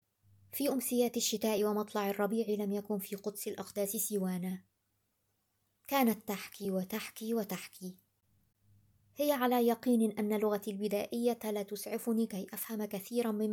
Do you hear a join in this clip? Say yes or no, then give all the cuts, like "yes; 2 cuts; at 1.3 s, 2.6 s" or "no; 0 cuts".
no; 0 cuts